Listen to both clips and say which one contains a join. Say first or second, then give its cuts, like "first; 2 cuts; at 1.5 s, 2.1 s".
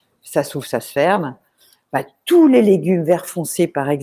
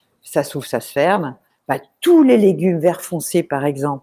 second; 1 cut; at 1.5 s